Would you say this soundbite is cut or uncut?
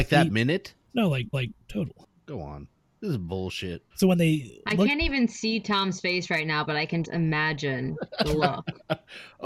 cut